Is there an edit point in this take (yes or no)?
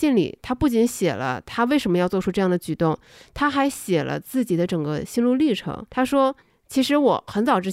yes